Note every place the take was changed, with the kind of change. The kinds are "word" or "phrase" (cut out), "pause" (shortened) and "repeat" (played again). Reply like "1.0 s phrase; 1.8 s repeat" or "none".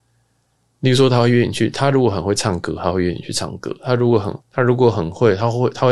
4.4 s pause